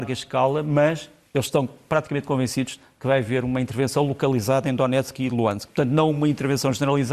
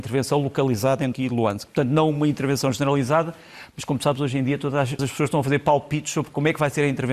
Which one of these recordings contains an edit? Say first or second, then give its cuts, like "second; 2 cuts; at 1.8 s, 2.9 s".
second; 2 cuts; at 1.1 s, 5.0 s